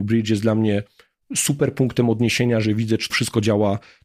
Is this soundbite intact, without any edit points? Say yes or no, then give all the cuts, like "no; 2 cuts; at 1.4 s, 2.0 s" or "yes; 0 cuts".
no; 1 cut; at 3.1 s